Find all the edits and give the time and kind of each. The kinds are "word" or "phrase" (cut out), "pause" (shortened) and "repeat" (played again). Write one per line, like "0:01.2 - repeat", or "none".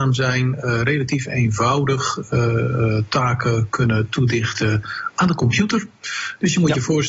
none